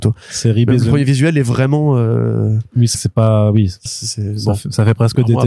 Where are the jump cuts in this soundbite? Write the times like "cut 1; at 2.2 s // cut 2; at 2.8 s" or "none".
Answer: cut 1; at 2.9 s // cut 2; at 3.9 s